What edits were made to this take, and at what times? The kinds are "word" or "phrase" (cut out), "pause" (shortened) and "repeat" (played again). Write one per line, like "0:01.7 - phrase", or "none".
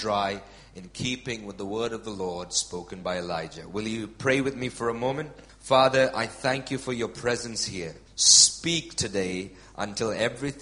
0:08.1 - pause